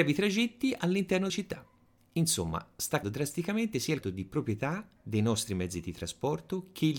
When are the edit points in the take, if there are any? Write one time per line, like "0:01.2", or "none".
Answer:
0:01.3
0:03.0
0:04.0

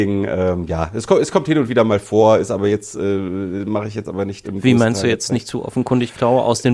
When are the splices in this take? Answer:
0:04.4

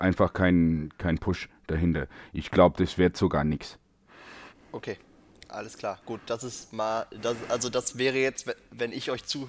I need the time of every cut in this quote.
0:04.5

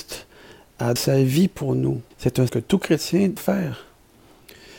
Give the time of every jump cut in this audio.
0:01.0
0:02.1
0:02.5
0:03.4

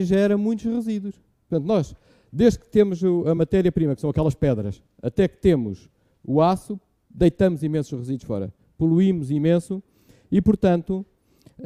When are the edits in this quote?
none

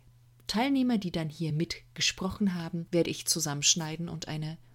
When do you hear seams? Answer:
none

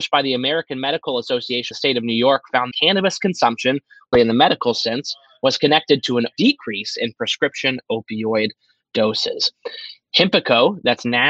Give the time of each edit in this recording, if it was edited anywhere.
0:01.7
0:02.7
0:04.1
0:06.3

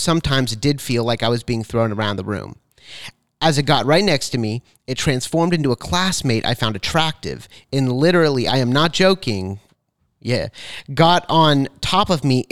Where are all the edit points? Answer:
none

